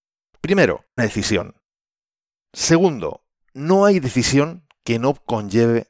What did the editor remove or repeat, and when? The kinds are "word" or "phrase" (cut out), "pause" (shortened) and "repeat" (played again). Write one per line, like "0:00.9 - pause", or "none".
0:01.0 - phrase

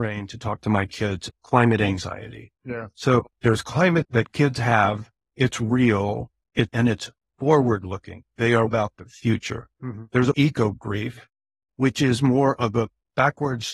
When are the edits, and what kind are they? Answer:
0:01.3 - word
0:02.6 - pause
0:04.0 - word
0:06.7 - phrase
0:08.7 - word
0:09.7 - pause
0:10.3 - word

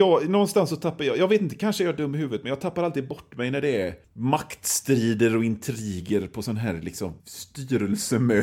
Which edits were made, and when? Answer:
0:04.0 - pause
0:07.2 - pause

